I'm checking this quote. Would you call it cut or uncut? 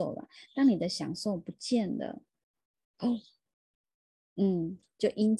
uncut